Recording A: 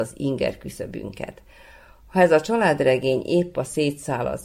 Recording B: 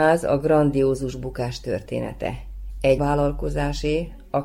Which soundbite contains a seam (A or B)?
B